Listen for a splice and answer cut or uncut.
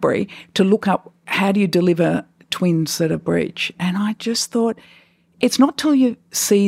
uncut